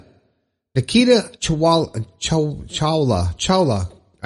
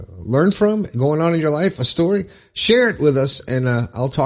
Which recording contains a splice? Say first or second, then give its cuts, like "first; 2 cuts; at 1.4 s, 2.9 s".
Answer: first; 1 cut; at 1.3 s